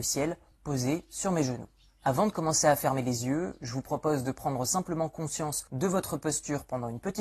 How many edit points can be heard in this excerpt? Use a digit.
1